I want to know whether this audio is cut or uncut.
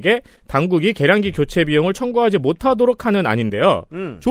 uncut